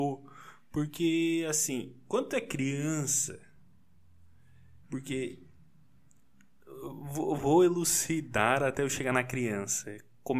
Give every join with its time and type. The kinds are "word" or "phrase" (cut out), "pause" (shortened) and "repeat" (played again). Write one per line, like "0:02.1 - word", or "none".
0:04.8 - pause
0:07.4 - word